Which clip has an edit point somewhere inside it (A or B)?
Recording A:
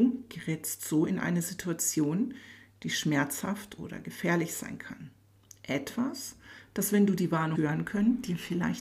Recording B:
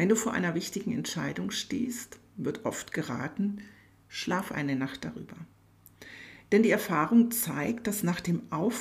A